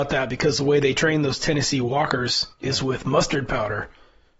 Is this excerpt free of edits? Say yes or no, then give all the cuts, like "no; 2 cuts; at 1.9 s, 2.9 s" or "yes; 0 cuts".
yes; 0 cuts